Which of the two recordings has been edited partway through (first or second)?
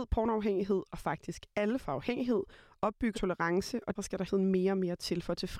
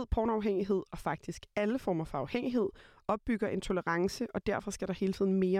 first